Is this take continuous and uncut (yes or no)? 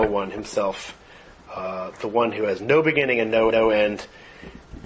no